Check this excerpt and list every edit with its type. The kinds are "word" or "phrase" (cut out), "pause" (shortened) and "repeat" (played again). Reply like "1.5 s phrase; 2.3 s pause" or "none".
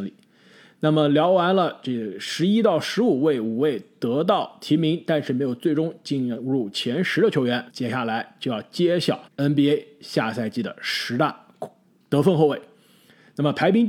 7.7 s pause; 9.3 s pause